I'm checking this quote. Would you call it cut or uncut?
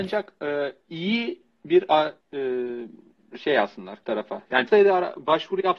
cut